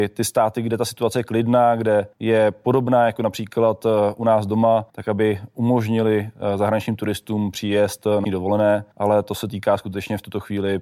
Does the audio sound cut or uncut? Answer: cut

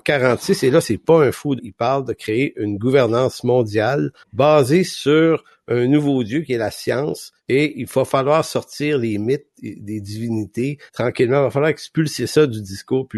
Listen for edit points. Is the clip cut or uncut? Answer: cut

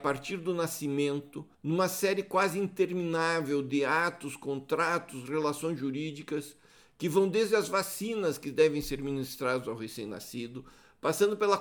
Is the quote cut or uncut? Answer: cut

